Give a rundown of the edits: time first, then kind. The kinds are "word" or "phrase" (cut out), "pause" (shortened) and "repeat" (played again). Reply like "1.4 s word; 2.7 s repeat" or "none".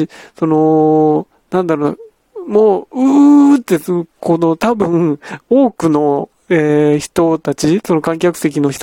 none